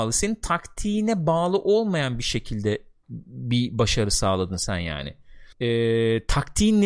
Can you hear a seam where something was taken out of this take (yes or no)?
yes